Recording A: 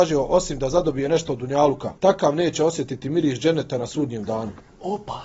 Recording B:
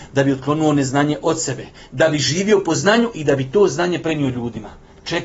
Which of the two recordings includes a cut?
A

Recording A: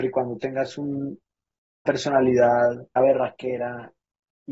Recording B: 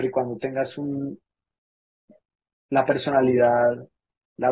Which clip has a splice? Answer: A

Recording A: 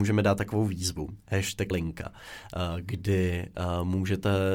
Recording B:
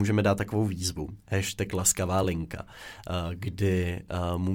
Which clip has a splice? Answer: A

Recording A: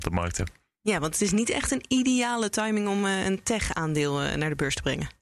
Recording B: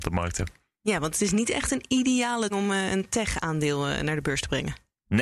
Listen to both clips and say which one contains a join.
B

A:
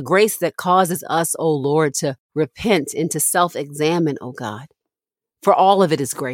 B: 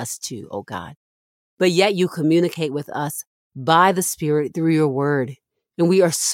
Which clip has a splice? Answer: A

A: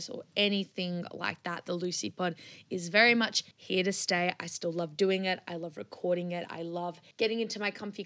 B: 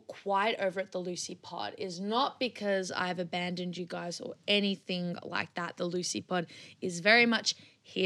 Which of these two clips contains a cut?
A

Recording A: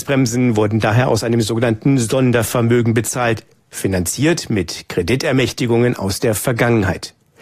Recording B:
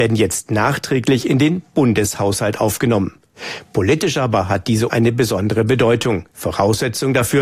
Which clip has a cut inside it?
B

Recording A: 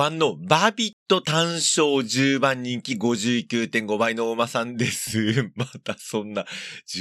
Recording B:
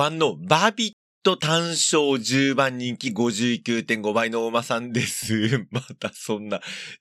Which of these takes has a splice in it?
A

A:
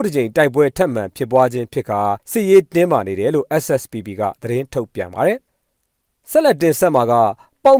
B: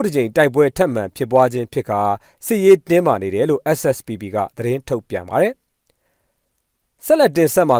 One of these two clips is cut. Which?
A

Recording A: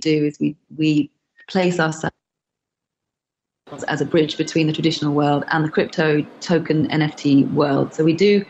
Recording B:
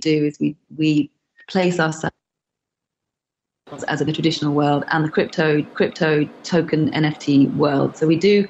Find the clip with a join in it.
B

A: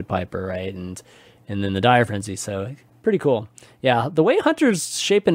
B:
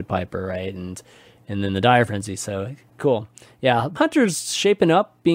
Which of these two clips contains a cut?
B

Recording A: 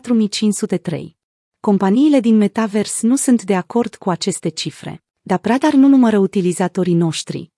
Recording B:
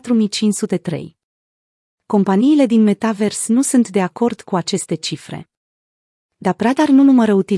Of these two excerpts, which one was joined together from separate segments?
A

